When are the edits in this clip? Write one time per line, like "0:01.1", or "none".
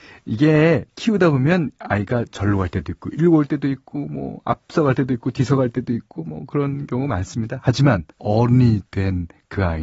0:08.1

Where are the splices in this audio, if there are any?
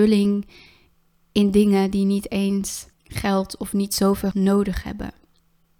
0:02.9
0:04.3

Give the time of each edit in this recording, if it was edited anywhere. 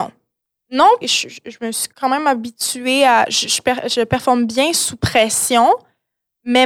0:01.0
0:01.9

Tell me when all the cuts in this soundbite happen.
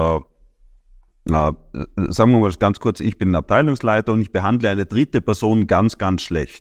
none

